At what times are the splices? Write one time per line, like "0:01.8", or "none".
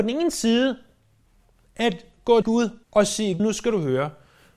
0:02.4
0:02.8
0:03.4